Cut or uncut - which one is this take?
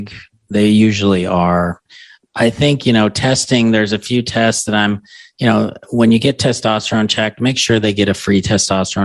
uncut